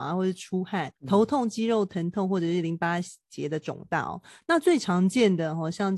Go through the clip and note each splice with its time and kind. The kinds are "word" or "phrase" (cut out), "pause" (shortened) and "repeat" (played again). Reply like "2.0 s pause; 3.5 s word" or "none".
1.0 s pause